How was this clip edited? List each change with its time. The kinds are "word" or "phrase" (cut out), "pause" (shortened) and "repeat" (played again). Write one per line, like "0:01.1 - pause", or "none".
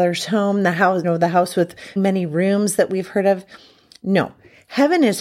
0:01.0 - word
0:02.0 - word